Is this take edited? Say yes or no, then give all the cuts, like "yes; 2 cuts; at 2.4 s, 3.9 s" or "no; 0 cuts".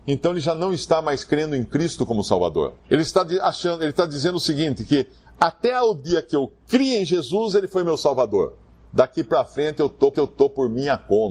yes; 2 cuts; at 2.8 s, 10.1 s